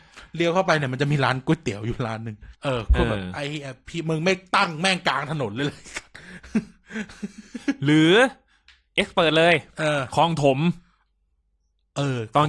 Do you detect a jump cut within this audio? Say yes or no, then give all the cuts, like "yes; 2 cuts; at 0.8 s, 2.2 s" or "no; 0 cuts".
yes; 1 cut; at 2.5 s